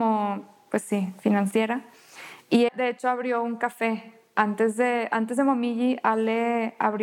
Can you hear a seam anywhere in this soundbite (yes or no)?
yes